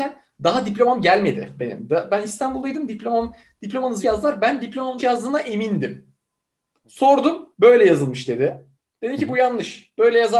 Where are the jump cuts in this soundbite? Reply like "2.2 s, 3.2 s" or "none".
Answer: 4.0 s, 5.0 s, 7.5 s, 8.7 s